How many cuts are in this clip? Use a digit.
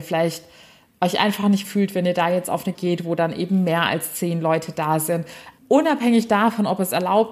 3